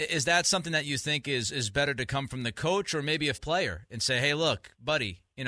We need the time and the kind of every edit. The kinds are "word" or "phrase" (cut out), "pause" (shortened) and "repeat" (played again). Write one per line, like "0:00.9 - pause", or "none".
0:03.3 - word